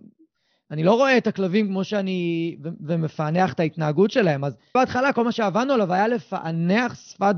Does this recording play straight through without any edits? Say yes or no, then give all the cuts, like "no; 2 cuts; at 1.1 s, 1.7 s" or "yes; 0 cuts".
no; 1 cut; at 4.7 s